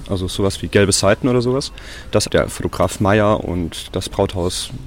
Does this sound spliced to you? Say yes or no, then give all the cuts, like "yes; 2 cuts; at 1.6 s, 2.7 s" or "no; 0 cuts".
no; 0 cuts